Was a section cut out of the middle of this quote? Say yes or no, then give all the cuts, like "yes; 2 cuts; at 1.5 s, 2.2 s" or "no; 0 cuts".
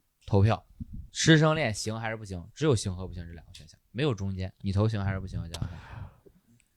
yes; 2 cuts; at 1.1 s, 4.6 s